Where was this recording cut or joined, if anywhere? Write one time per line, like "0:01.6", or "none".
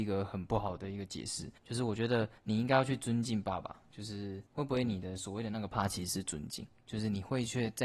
0:01.6
0:02.4
0:04.5